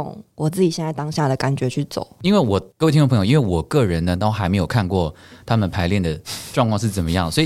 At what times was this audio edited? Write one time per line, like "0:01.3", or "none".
0:02.7